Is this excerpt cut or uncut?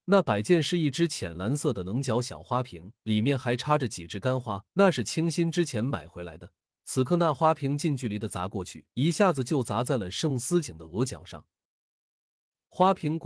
cut